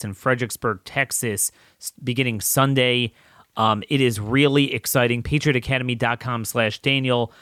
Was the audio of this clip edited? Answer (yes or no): no